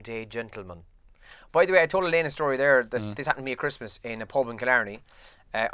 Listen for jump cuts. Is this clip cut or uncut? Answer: uncut